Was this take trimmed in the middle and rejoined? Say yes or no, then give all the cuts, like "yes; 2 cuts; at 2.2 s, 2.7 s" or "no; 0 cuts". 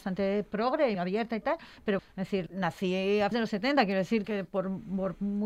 yes; 5 cuts; at 0.9 s, 2.0 s, 2.5 s, 3.3 s, 4.2 s